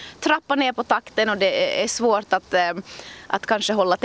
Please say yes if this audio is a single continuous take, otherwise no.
yes